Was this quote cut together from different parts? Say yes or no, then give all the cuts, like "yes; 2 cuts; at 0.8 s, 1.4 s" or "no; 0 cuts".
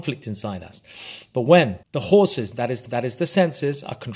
yes; 2 cuts; at 1.8 s, 2.9 s